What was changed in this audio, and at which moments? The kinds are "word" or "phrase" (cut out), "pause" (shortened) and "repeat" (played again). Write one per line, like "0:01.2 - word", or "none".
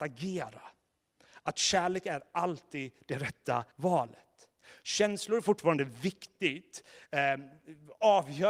0:03.7 - pause

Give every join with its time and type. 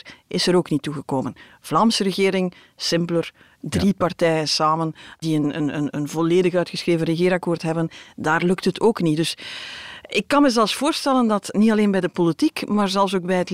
none

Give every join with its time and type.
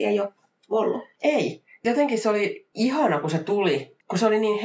0:01.8 - word

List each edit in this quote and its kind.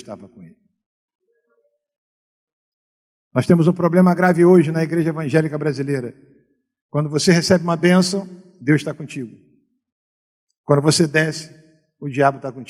none

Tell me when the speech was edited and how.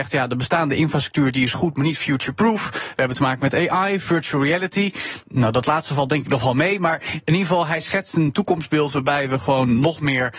none

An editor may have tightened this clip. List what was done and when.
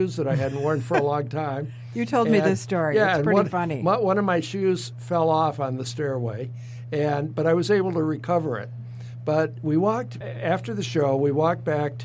0:10.2 - word

